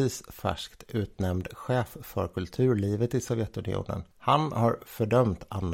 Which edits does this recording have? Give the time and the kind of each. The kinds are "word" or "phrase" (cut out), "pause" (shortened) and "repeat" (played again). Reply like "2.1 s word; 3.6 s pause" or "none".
4.1 s pause